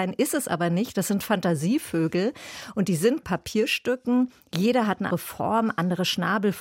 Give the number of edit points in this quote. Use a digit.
2